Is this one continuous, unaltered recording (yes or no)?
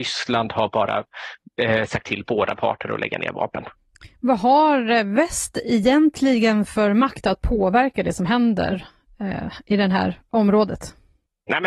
yes